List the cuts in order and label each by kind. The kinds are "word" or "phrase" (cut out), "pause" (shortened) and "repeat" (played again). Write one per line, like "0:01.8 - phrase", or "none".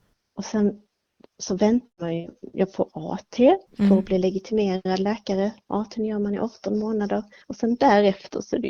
0:03.7 - pause